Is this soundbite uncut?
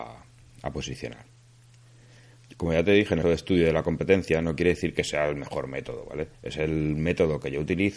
no; 2 cuts; at 3.2 s, 6.3 s

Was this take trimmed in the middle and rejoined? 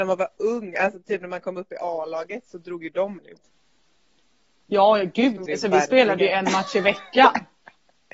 yes; 2 cuts; at 3.2 s, 5.5 s

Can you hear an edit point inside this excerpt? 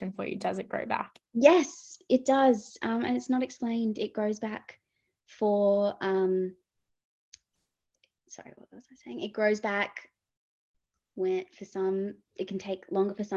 no; 0 cuts

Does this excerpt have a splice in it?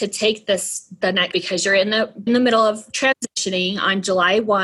yes; 2 cuts; at 1.3 s, 2.3 s

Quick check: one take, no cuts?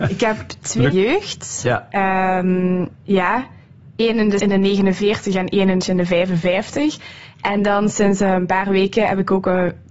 no; 4 cuts; at 0.9 s, 2.9 s, 4.4 s, 5.8 s

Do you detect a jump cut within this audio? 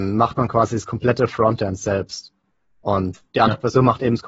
no; 0 cuts

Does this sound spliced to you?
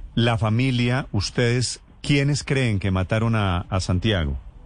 no; 0 cuts

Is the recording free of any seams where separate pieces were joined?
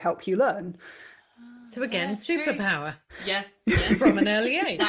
yes; 0 cuts

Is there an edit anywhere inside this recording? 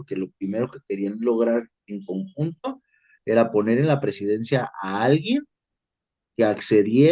no; 0 cuts

